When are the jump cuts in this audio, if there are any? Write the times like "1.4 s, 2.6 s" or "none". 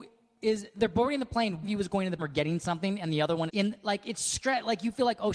1.6 s, 2.2 s, 3.5 s